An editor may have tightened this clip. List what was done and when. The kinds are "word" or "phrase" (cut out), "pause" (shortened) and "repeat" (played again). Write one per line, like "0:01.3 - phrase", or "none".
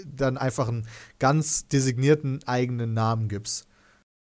none